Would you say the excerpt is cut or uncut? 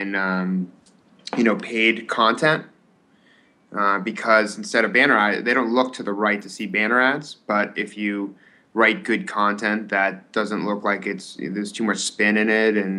uncut